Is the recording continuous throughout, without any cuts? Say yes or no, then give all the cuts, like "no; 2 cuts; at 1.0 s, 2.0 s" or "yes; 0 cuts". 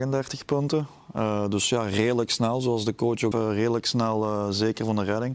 no; 1 cut; at 3.3 s